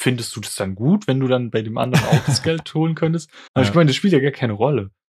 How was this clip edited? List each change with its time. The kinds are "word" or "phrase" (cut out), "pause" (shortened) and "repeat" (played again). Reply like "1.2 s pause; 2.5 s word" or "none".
3.5 s pause